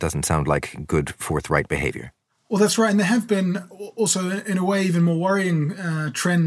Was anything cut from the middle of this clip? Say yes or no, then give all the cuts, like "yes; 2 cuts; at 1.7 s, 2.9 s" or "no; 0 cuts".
no; 0 cuts